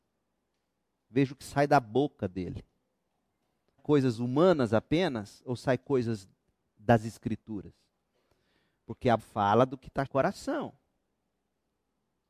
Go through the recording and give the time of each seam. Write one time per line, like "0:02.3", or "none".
0:03.8
0:09.2
0:10.1